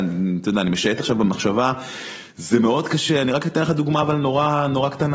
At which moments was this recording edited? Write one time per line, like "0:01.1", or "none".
none